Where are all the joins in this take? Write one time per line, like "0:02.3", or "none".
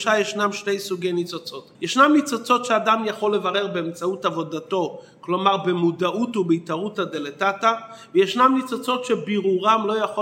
0:01.7